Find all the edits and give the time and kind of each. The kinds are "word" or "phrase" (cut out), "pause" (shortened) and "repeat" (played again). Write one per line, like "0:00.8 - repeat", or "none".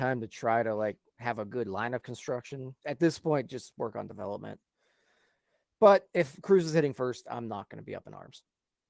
0:01.1 - pause
0:02.8 - pause